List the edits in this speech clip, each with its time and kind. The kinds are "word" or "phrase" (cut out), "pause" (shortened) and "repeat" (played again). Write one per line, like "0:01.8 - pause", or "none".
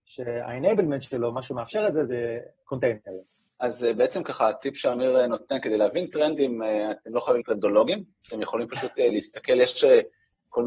0:07.4 - word